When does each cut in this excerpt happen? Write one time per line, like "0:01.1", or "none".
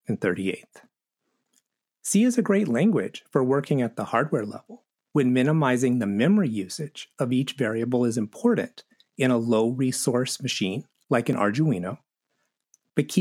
none

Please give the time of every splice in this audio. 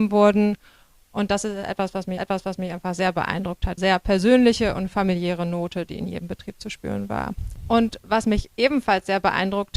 0:02.2
0:03.8

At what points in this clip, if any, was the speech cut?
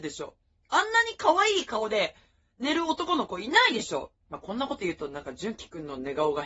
0:04.2

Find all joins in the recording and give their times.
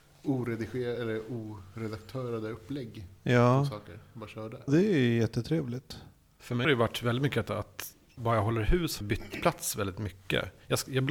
0:04.7
0:06.6
0:08.2
0:09.0

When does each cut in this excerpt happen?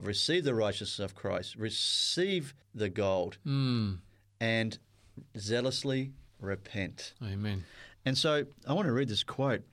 0:02.6
0:06.3

